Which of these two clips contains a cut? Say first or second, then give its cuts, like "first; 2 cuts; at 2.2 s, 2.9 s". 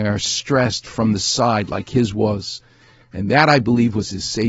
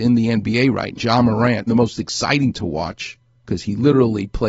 second; 2 cuts; at 1.0 s, 1.7 s